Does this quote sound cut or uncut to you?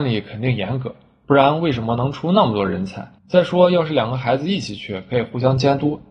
cut